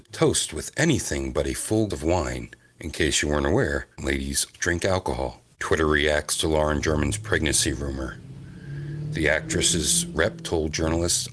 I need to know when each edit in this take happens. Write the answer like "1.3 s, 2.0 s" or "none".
1.9 s, 2.6 s, 4.0 s, 4.5 s, 5.5 s